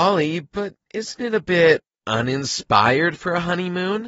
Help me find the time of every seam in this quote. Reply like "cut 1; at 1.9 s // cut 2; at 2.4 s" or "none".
none